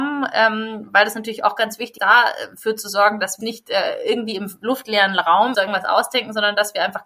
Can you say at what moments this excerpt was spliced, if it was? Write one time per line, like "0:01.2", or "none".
0:02.0
0:03.4
0:05.5